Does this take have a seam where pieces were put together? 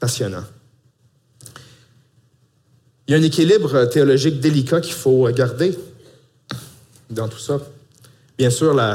no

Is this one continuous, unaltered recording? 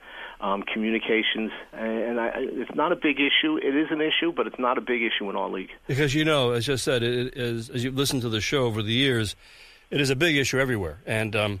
yes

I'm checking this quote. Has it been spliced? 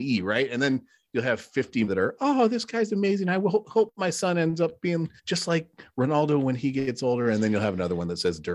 yes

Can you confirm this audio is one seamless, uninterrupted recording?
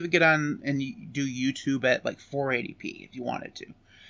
yes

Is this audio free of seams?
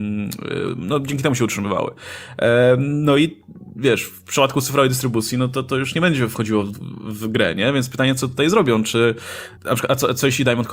no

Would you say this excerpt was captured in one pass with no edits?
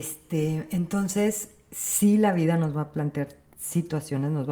yes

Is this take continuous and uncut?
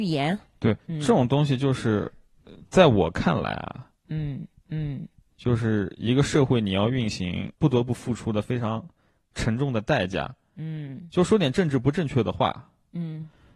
no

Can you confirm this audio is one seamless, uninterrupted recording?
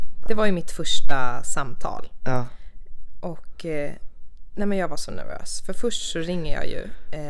yes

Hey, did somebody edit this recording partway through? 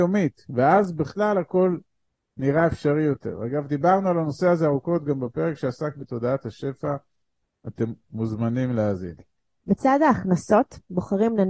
no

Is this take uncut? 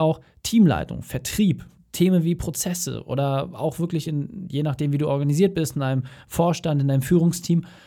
yes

